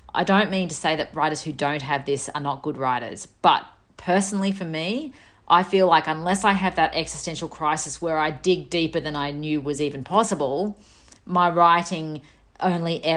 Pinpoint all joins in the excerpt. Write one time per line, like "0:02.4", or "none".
none